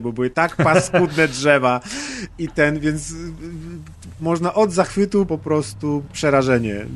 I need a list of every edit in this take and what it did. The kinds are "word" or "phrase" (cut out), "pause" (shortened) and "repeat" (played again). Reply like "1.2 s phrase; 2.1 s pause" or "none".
2.5 s word; 5.3 s word